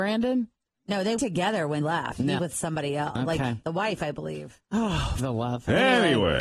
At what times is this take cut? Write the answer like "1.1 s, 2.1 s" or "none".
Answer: 1.2 s, 1.8 s, 2.4 s, 3.6 s, 5.2 s